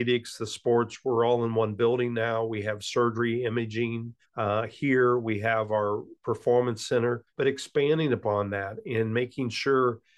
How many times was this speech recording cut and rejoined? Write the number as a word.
two